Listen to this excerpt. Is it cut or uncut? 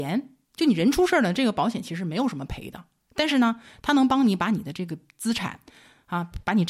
uncut